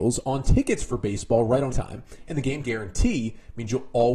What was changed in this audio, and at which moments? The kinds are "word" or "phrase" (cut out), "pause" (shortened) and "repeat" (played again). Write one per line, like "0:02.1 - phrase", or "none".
0:01.7 - word
0:02.6 - word